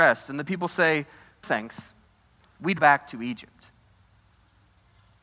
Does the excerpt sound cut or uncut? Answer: cut